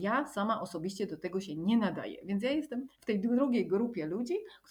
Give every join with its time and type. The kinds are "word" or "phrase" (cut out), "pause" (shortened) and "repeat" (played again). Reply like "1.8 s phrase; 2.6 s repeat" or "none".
2.9 s pause

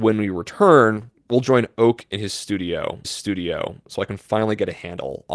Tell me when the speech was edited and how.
3.0 s repeat

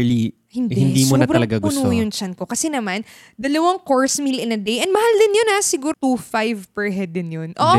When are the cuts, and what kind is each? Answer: 5.9 s word

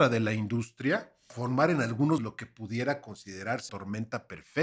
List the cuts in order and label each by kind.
1.3 s word; 2.2 s word; 3.7 s word

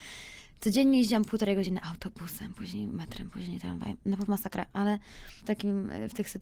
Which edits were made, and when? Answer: 4.3 s word; 5.4 s word

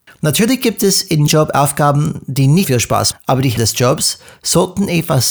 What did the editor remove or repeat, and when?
1.3 s word; 2.6 s word; 3.1 s word; 3.6 s word

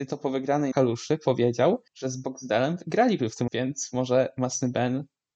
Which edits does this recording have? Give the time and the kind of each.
1.9 s pause; 3.5 s word

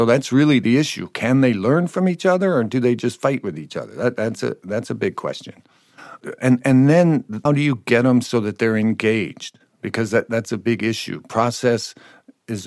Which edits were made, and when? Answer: 7.5 s word

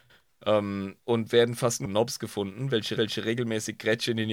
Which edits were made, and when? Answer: 1.0 s pause; 1.9 s phrase; 3.0 s repeat

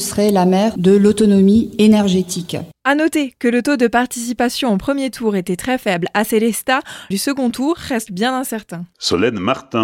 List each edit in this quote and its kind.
7.1 s phrase; 8.1 s word

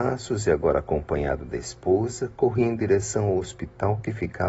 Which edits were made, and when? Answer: none

